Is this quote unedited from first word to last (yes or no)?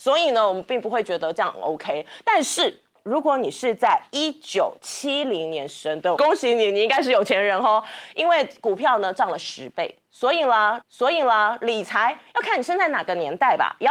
no